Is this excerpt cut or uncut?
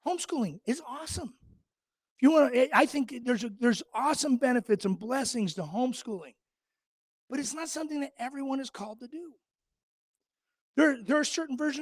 uncut